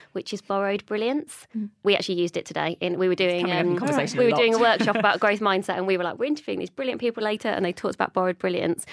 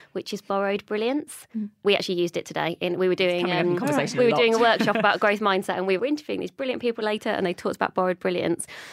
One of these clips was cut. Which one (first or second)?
second